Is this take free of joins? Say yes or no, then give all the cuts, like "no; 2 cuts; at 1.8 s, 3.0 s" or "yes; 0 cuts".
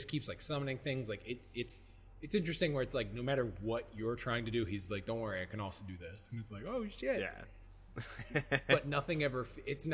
yes; 0 cuts